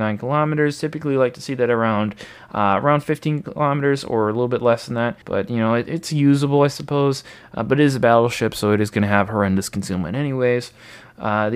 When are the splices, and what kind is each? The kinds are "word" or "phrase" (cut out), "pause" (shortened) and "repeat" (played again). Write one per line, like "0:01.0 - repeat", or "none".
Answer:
0:05.2 - pause